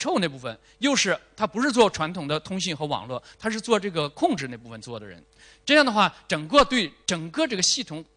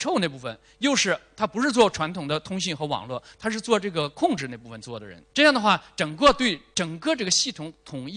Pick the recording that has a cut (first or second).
second